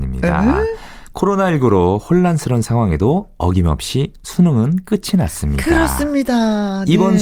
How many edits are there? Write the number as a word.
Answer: zero